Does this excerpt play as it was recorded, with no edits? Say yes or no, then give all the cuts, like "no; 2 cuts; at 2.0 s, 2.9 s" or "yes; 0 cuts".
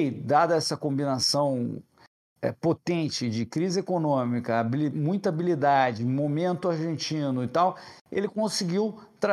yes; 0 cuts